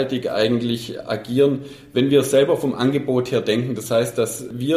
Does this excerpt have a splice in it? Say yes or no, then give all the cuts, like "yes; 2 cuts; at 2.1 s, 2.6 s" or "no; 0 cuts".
no; 0 cuts